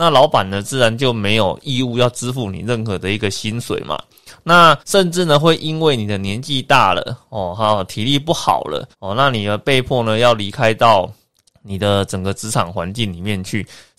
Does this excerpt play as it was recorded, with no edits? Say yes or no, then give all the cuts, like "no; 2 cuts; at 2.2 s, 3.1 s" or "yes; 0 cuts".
no; 3 cuts; at 4.8 s, 8.9 s, 11.3 s